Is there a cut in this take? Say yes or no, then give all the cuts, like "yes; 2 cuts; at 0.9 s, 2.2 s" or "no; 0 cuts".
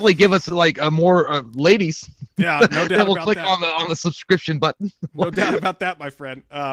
no; 0 cuts